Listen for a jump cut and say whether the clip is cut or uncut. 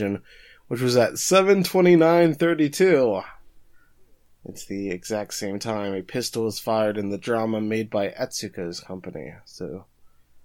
uncut